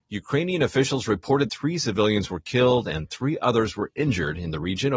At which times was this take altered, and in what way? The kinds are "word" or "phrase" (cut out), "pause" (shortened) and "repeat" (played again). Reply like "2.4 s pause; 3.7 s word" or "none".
1.5 s word